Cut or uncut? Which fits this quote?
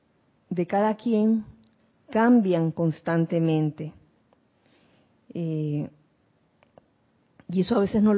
uncut